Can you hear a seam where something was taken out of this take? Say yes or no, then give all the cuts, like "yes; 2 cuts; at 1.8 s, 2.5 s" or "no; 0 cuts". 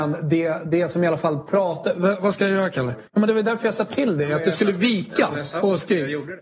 yes; 1 cut; at 3.1 s